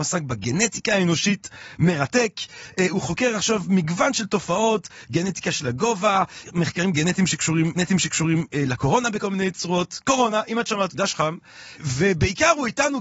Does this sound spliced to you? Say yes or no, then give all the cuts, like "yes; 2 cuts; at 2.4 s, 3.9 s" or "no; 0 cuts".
yes; 2 cuts; at 7.7 s, 10.9 s